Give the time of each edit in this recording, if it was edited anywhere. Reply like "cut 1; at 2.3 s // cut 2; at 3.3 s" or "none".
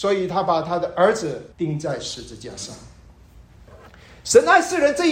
cut 1; at 1.5 s